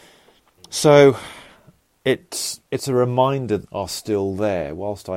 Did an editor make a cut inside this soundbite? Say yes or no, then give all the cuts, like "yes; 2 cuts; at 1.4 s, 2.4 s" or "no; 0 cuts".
yes; 2 cuts; at 2.7 s, 3.7 s